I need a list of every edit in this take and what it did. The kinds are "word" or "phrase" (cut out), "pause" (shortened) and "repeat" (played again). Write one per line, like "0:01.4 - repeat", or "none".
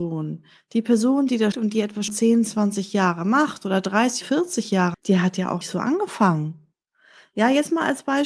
0:01.5 - word
0:02.1 - word
0:04.2 - word
0:04.9 - word
0:05.6 - word